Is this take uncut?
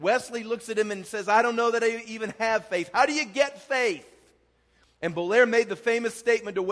yes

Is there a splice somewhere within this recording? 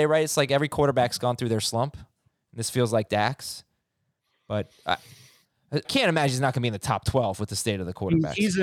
yes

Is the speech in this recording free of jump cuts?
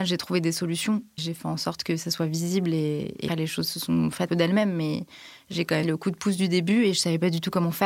no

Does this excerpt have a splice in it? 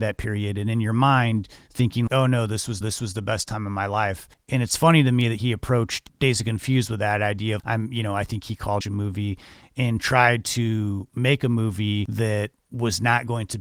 yes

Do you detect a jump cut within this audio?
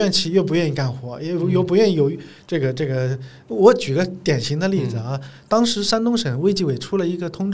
no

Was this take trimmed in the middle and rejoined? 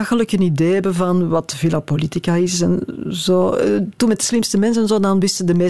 no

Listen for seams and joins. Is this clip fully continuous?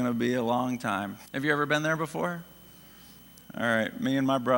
no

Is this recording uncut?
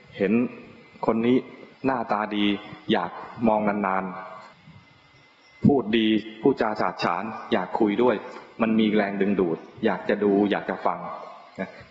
no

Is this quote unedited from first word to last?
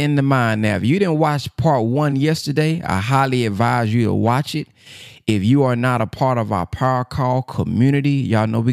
yes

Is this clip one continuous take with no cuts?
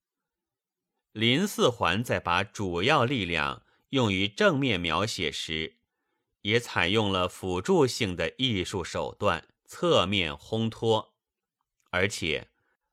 no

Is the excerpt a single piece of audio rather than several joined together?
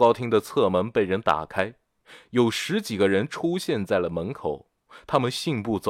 yes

